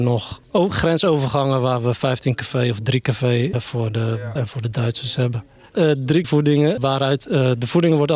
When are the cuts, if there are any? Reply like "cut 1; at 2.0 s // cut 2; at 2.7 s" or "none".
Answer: cut 1; at 3.5 s // cut 2; at 4.4 s // cut 3; at 6.2 s // cut 4; at 6.8 s